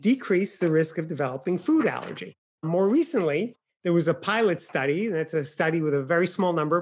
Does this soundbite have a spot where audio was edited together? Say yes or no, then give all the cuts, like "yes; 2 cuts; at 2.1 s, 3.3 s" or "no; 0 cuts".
no; 0 cuts